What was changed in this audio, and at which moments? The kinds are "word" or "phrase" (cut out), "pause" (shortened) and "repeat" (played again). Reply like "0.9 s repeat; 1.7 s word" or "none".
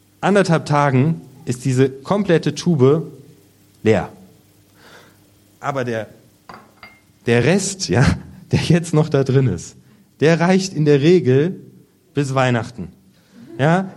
none